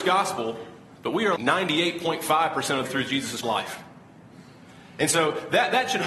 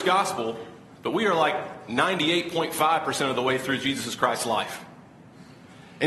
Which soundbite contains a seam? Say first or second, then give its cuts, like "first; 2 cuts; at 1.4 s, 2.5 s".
first; 3 cuts; at 1.4 s, 2.8 s, 3.4 s